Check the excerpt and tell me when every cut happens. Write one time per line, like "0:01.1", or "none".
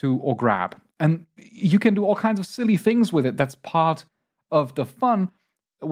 none